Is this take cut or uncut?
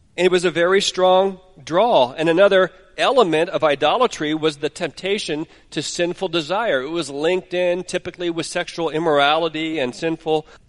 uncut